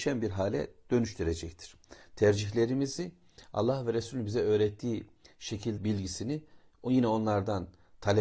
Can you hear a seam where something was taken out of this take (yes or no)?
yes